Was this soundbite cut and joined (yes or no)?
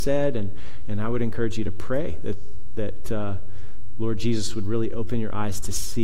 no